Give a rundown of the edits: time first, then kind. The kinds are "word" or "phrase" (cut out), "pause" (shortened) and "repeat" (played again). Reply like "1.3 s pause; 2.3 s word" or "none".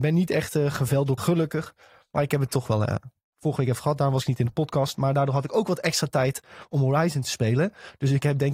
1.2 s word